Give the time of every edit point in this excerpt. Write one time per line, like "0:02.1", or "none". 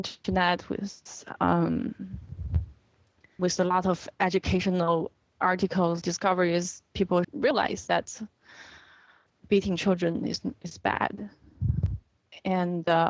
0:03.4
0:06.0
0:07.2
0:09.3
0:10.6